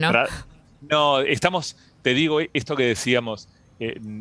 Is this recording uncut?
yes; 0 cuts

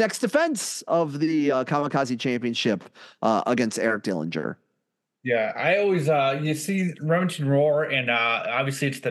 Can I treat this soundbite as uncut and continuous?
yes; 0 cuts

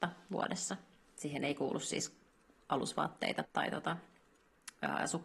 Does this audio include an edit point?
yes; 1 cut; at 3.4 s

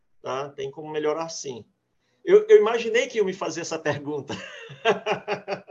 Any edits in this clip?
no; 0 cuts

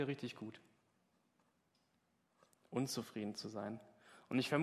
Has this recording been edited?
no; 0 cuts

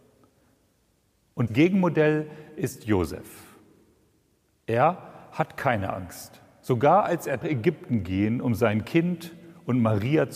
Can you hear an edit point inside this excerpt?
yes; 2 cuts; at 1.5 s, 7.4 s

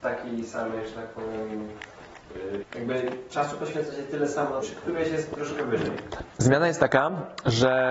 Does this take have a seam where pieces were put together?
yes; 2 cuts; at 2.6 s, 4.6 s

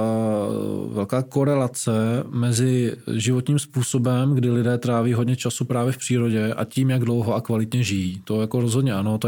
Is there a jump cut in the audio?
no; 0 cuts

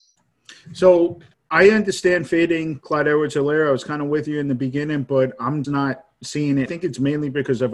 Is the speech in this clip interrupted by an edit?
yes; 3 cuts; at 1.3 s, 5.6 s, 6.7 s

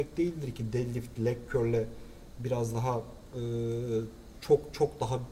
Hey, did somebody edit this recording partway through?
no; 0 cuts

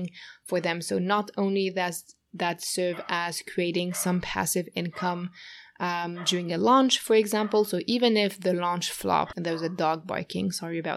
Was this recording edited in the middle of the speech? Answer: yes; 1 cut; at 9.3 s

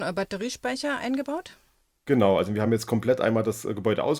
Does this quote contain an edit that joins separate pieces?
no; 0 cuts

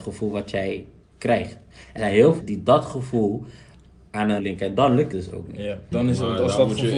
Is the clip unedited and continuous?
no; 5 cuts; at 2.0 s, 2.4 s, 4.4 s, 5.1 s, 5.9 s

